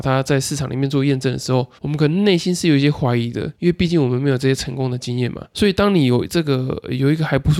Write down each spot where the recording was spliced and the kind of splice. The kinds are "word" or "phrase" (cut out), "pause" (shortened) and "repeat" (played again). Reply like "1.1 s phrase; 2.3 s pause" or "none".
1.8 s pause; 3.5 s pause; 5.5 s pause